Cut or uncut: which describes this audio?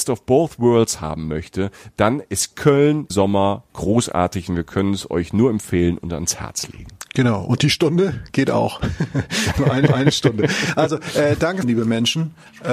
cut